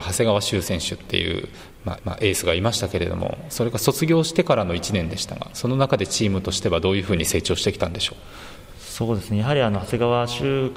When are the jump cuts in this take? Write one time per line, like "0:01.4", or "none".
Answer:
0:02.0